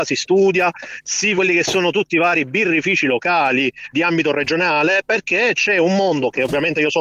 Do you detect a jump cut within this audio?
yes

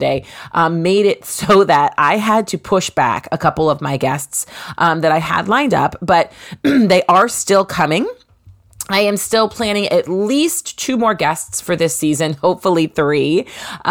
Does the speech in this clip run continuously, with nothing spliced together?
yes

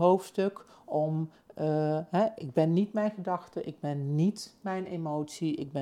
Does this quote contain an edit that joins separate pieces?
no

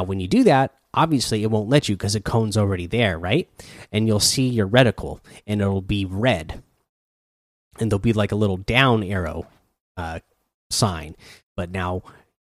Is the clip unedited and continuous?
yes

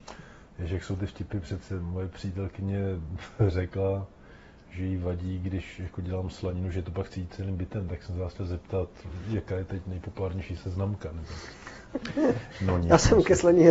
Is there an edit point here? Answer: no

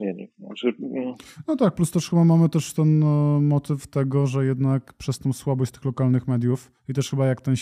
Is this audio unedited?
yes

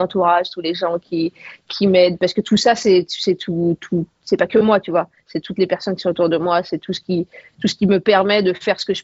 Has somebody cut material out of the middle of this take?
no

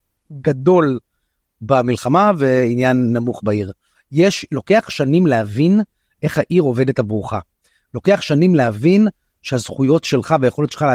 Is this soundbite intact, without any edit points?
yes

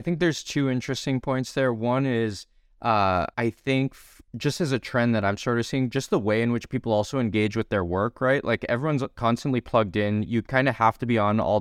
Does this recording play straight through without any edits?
no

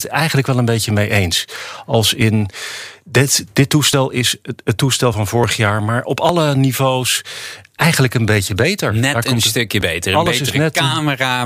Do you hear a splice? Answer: no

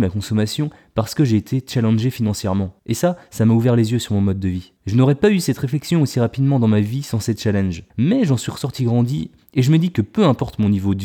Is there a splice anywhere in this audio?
yes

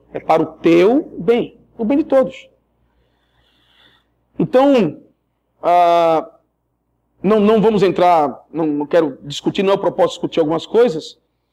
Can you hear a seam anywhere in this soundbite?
no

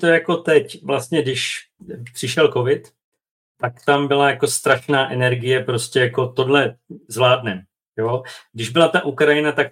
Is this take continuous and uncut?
yes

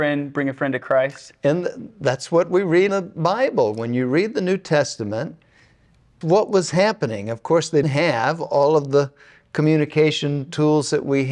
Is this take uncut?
no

